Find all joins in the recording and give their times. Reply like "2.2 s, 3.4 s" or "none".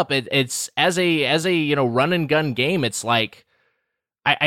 none